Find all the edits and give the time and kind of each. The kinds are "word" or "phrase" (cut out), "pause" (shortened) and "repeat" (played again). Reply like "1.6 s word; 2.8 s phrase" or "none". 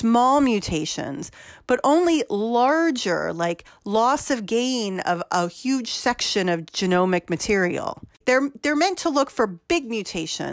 8.1 s pause